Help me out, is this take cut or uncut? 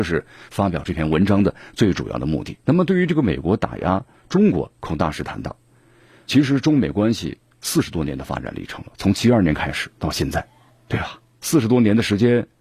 cut